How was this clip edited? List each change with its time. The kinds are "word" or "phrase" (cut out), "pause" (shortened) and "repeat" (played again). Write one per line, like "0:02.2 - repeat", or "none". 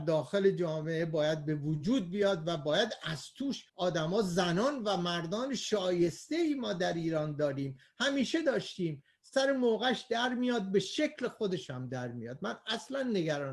0:03.7 - pause